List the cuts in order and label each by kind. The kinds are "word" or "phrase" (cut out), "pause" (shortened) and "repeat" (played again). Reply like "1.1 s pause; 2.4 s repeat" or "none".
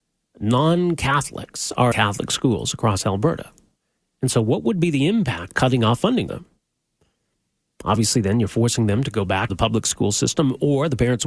1.9 s word; 5.5 s word; 6.3 s word; 9.5 s word